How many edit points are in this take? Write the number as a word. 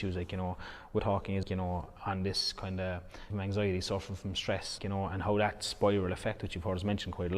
four